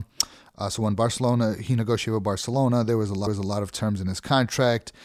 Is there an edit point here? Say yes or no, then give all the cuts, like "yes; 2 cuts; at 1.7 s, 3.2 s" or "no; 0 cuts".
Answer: yes; 1 cut; at 3.3 s